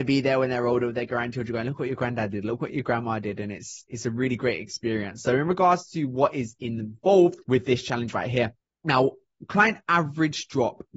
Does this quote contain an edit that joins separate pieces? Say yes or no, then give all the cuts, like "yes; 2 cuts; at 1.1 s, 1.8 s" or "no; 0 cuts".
yes; 2 cuts; at 7.4 s, 8.6 s